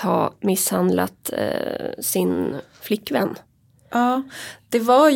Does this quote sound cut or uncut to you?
uncut